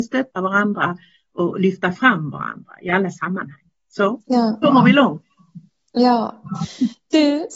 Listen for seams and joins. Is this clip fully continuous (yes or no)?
yes